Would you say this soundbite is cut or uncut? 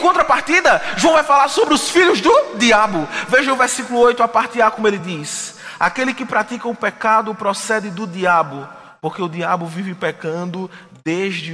uncut